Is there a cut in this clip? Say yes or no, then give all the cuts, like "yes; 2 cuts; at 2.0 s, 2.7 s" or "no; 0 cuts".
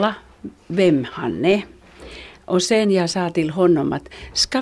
no; 0 cuts